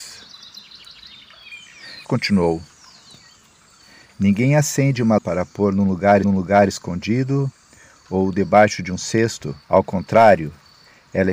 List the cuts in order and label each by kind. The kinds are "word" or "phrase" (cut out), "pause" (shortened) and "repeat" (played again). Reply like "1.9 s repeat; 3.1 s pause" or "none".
2.0 s word; 5.2 s word; 6.2 s repeat; 9.6 s pause